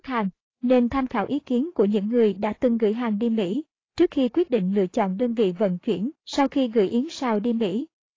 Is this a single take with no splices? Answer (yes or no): no